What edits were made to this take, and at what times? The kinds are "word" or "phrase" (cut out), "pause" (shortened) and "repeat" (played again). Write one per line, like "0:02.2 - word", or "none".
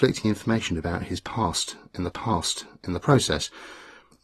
0:02.1 - repeat